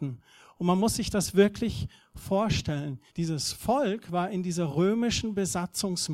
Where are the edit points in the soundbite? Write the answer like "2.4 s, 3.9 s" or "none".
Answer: 3.1 s